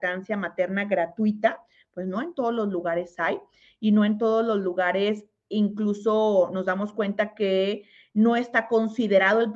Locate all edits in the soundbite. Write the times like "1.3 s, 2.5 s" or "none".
none